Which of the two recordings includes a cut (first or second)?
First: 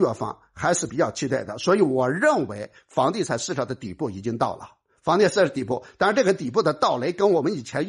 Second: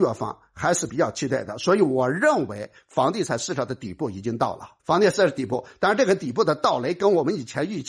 second